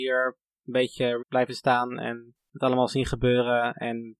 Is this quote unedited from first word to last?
no; 1 cut; at 1.2 s

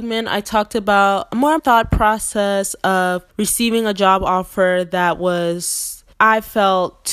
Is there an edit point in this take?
yes; 3 cuts; at 1.6 s, 3.3 s, 6.1 s

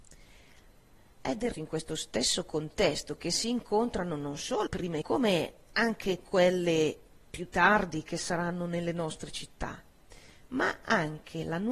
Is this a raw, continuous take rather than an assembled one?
no; 3 cuts; at 1.5 s, 4.7 s, 5.0 s

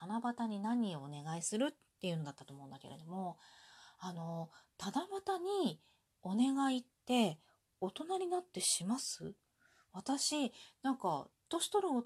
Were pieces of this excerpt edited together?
no; 0 cuts

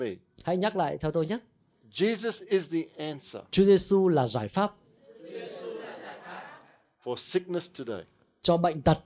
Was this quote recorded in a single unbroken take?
yes; 0 cuts

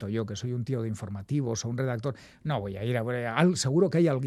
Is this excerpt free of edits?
yes; 0 cuts

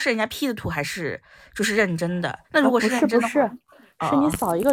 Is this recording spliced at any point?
yes; 1 cut; at 2.4 s

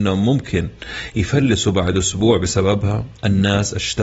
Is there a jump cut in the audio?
no; 0 cuts

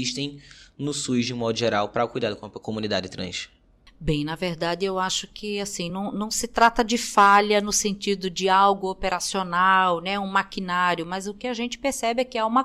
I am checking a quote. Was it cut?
no; 0 cuts

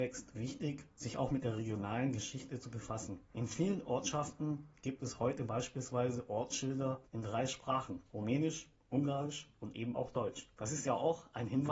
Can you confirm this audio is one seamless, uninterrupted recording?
no; 5 cuts; at 0.9 s, 3.3 s, 7.1 s, 8.1 s, 10.5 s

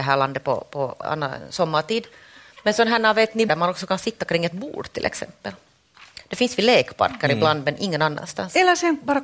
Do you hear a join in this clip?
yes; 2 cuts; at 1.0 s, 3.5 s

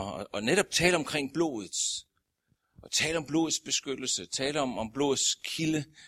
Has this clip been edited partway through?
no; 0 cuts

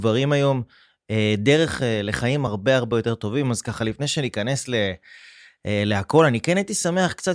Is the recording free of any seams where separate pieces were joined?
yes; 0 cuts

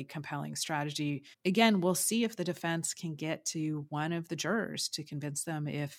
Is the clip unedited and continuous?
no; 1 cut; at 1.3 s

